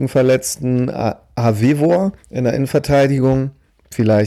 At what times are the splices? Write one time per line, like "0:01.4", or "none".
0:02.2

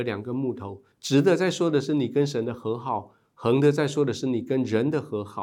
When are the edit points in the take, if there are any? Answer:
0:00.9

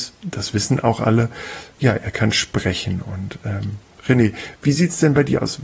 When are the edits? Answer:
none

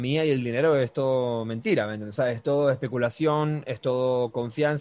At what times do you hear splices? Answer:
none

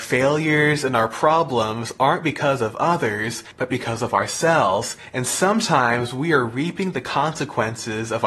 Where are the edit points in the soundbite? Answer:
none

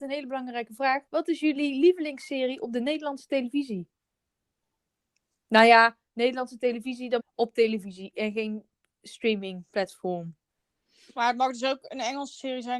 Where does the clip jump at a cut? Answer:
0:01.1
0:07.2

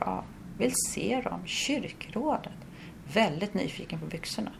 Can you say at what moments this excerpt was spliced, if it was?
none

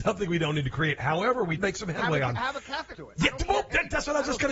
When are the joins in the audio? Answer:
0:01.6
0:02.9

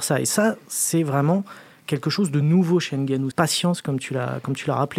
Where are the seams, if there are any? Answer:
0:03.3

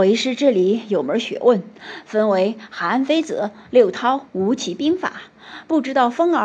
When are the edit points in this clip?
0:04.3

